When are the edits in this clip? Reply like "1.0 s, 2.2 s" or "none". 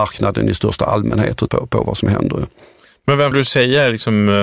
1.5 s, 3.3 s